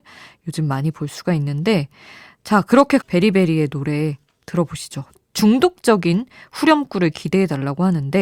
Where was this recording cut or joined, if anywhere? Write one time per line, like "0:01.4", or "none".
0:03.0